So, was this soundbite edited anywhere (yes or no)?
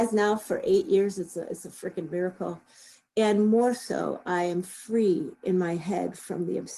no